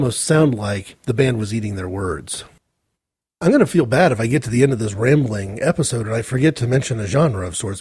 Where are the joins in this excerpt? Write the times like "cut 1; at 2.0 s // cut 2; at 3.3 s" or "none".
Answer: cut 1; at 2.9 s